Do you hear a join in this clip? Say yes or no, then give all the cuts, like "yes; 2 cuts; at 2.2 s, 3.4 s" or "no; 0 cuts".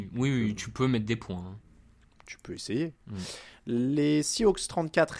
no; 0 cuts